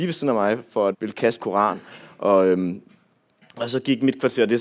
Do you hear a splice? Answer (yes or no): yes